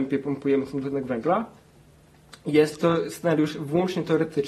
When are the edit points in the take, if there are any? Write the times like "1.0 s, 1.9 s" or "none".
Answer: 2.8 s